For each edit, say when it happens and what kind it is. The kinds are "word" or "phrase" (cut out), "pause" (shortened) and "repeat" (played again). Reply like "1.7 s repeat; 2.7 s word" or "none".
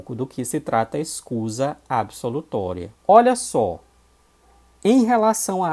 3.0 s pause